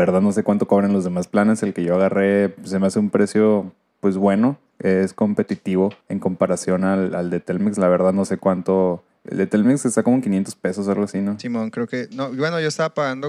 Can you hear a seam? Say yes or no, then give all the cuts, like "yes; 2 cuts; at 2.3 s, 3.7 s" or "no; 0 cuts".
yes; 2 cuts; at 6.0 s, 9.1 s